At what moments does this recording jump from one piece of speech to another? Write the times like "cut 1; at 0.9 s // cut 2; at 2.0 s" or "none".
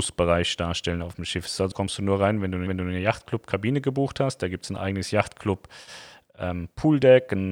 cut 1; at 1.7 s // cut 2; at 2.7 s